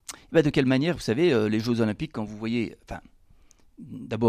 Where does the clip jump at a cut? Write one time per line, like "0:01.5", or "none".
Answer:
none